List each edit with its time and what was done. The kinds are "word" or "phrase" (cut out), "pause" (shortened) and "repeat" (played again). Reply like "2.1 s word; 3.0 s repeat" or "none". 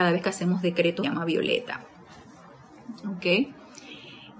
1.0 s word